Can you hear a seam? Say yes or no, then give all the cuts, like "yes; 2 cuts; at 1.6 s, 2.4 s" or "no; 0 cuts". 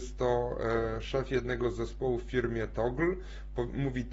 no; 0 cuts